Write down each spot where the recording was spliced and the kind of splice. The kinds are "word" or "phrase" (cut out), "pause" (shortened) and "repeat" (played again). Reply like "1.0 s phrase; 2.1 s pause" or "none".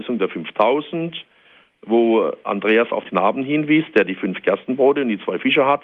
3.0 s word